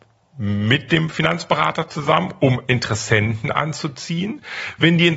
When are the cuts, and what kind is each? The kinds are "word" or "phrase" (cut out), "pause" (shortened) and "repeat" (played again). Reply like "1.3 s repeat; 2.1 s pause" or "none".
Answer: none